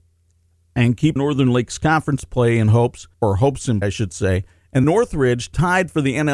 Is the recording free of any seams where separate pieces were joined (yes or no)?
no